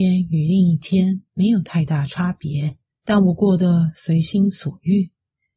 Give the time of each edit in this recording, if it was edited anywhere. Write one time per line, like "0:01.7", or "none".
0:02.9